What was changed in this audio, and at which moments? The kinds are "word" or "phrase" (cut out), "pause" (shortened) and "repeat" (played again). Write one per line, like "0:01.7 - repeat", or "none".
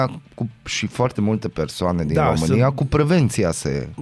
none